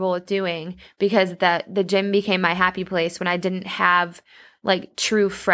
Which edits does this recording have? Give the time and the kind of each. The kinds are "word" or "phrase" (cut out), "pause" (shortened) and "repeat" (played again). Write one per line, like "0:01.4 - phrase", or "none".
none